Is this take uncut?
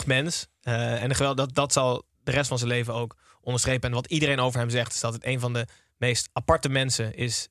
yes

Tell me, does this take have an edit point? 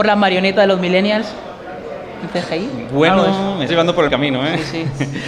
yes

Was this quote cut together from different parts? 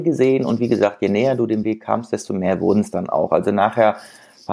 no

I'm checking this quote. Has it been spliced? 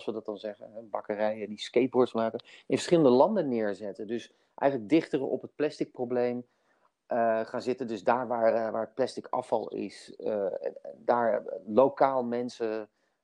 no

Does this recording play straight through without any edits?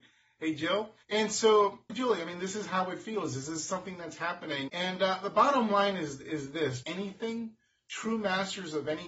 no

